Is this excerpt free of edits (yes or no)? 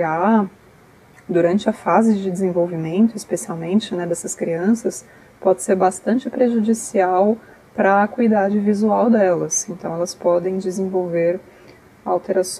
yes